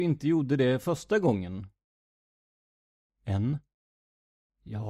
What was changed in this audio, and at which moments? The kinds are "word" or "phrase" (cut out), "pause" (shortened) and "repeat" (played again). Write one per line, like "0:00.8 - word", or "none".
none